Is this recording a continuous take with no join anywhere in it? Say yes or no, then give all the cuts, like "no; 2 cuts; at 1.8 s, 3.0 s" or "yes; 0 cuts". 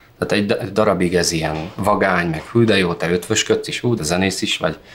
no; 1 cut; at 4.0 s